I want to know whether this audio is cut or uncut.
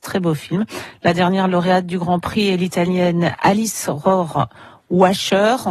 uncut